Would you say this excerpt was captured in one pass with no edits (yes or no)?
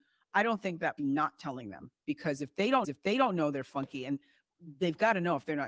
no